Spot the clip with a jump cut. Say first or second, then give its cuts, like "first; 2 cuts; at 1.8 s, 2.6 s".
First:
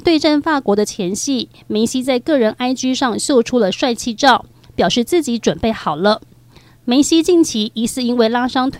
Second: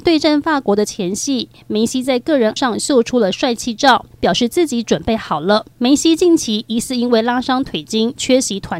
second; 3 cuts; at 2.6 s, 4.1 s, 5.7 s